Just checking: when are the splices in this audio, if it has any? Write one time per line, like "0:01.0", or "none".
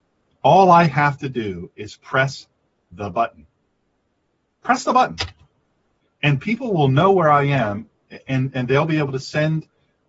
none